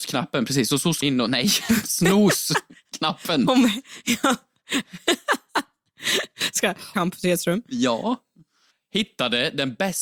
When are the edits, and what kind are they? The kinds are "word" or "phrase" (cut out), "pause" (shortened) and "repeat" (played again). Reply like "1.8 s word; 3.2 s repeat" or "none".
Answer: 1.0 s word; 6.9 s phrase